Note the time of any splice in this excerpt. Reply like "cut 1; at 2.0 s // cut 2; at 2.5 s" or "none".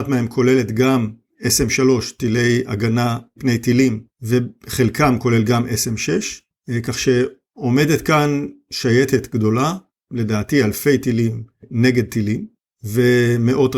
none